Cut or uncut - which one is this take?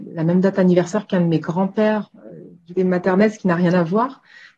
cut